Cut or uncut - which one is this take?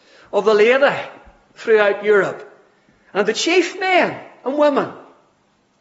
uncut